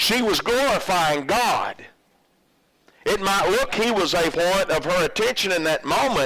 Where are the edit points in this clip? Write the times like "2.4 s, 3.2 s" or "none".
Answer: 3.7 s, 4.3 s